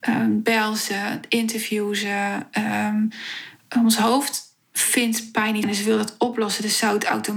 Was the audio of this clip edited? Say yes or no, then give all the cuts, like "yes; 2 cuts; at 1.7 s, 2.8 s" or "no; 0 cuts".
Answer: yes; 1 cut; at 5.6 s